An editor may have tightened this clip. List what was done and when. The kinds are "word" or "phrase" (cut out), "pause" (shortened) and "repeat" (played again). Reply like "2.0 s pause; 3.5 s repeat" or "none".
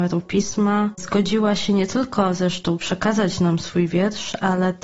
none

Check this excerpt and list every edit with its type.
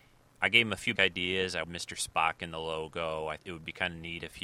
1.0 s word; 1.6 s word; 3.4 s word

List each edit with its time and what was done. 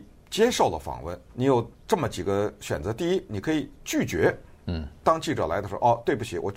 1.2 s pause; 1.7 s pause

